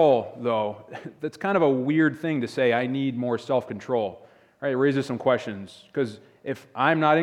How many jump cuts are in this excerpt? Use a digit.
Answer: 0